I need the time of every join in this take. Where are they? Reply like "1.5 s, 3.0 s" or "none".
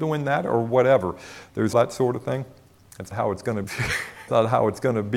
1.7 s, 3.1 s, 3.6 s, 4.3 s

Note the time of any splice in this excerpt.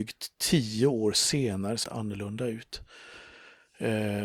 1.8 s

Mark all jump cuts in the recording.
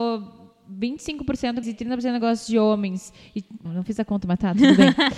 1.6 s, 3.6 s

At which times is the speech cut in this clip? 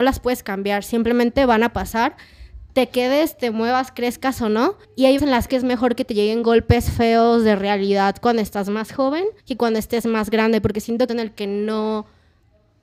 4.8 s, 5.2 s, 5.5 s, 9.4 s, 11.1 s

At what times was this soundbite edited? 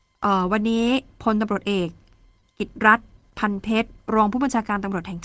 none

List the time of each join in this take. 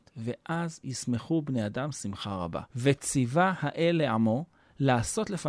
2.7 s

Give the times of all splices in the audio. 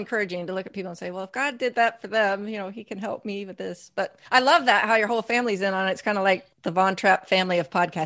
4.3 s, 6.5 s

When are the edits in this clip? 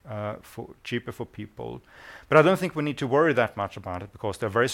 none

